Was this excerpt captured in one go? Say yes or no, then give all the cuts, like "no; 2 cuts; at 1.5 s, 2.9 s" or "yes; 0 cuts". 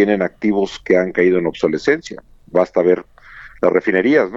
yes; 0 cuts